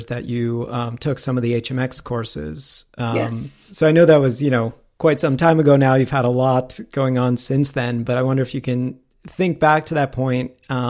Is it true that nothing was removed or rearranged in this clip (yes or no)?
yes